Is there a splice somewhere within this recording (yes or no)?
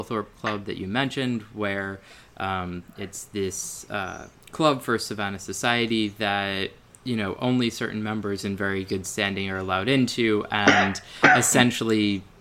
no